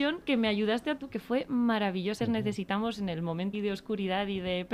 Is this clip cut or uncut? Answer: cut